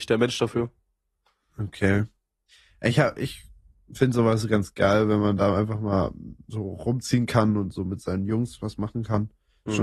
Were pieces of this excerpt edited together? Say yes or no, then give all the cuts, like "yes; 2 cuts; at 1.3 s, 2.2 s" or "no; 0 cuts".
no; 0 cuts